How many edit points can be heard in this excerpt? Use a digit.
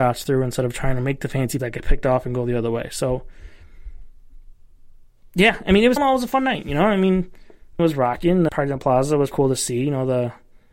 5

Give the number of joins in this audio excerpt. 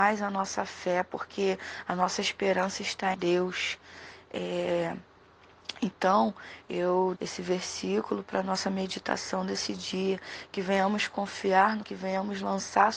3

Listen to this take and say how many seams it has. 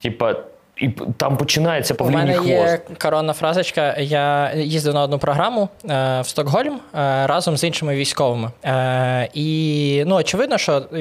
2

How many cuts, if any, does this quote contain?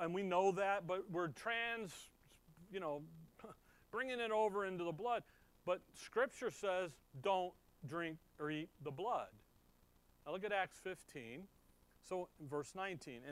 0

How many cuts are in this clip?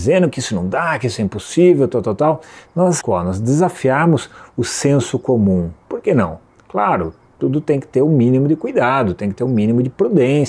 1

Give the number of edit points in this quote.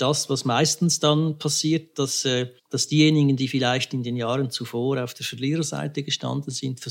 1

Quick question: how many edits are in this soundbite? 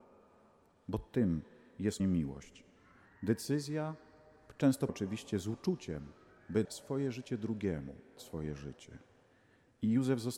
4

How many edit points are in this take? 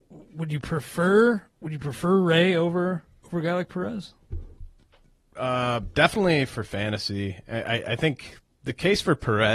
1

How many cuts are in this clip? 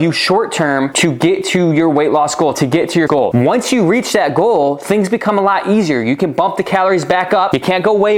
1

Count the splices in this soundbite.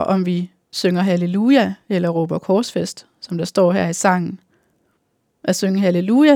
0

